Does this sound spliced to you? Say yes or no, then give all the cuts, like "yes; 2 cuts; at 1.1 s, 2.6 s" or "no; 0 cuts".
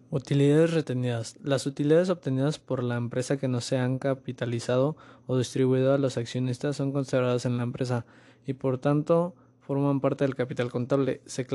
no; 0 cuts